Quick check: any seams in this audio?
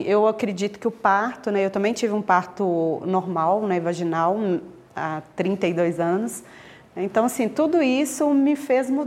no; 0 cuts

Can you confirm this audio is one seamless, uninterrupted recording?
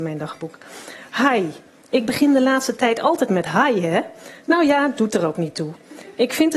yes; 0 cuts

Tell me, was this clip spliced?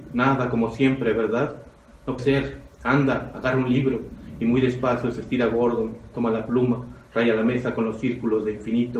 yes; 1 cut; at 2.2 s

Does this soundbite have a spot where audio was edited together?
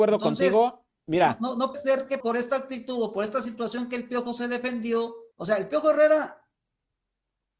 yes; 3 cuts; at 1.7 s, 2.2 s, 5.3 s

